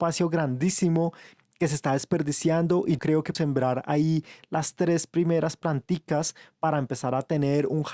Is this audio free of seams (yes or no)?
no